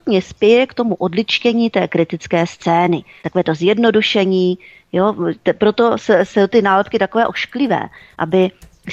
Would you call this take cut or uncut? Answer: uncut